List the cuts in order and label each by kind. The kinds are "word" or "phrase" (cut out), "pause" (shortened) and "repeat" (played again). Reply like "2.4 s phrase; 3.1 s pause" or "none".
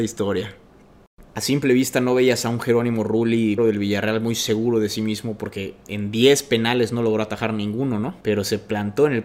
1.3 s pause; 3.6 s word; 8.2 s pause